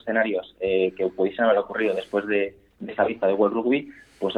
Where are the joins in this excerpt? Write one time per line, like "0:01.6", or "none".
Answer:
none